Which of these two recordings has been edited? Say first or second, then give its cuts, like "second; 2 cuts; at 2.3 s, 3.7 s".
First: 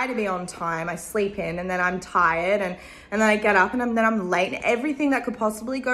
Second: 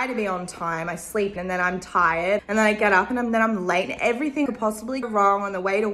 second; 4 cuts; at 1.4 s, 2.4 s, 4.5 s, 5.0 s